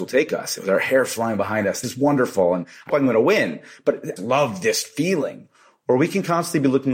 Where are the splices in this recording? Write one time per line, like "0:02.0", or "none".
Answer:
0:01.8
0:02.9
0:04.2